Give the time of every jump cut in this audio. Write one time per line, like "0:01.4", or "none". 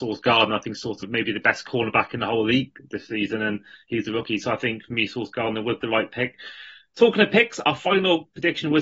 0:01.0